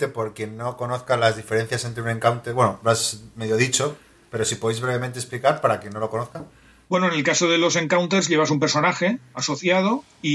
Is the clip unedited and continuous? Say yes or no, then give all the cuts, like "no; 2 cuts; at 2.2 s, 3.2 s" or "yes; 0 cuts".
yes; 0 cuts